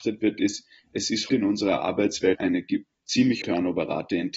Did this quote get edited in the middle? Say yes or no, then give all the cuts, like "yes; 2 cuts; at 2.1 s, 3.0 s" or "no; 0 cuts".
yes; 3 cuts; at 1.3 s, 2.4 s, 3.4 s